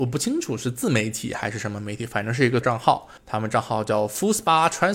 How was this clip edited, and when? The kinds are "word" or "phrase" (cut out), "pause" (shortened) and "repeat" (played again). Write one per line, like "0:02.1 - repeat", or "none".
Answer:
0:02.6 - word
0:03.2 - pause